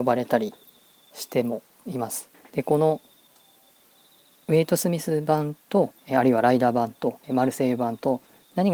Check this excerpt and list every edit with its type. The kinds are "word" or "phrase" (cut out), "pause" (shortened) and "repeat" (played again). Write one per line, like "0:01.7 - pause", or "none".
0:02.3 - pause
0:06.0 - pause
0:07.2 - pause